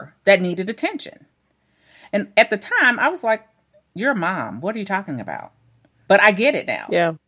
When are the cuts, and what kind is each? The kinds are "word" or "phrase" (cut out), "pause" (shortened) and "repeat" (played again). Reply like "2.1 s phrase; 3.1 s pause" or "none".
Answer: none